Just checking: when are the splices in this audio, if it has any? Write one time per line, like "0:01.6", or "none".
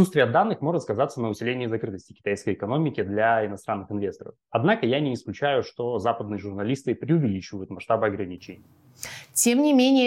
none